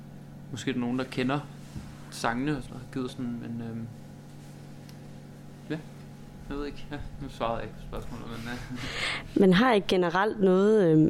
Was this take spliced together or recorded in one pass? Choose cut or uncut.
cut